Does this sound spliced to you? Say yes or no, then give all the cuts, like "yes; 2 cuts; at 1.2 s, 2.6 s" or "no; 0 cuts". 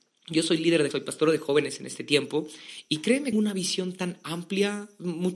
yes; 2 cuts; at 0.9 s, 3.3 s